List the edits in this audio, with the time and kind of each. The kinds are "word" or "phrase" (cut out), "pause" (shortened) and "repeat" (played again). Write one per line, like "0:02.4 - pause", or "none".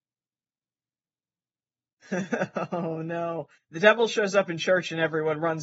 0:03.5 - pause